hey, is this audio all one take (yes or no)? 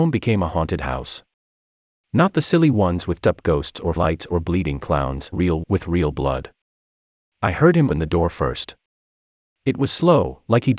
no